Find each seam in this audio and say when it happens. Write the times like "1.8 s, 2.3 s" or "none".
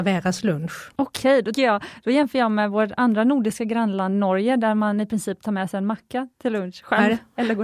0.9 s, 1.5 s